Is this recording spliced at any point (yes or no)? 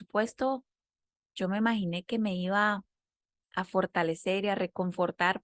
no